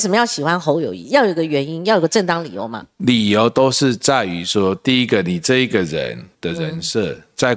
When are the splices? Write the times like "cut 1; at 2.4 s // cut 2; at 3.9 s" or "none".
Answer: cut 1; at 6.3 s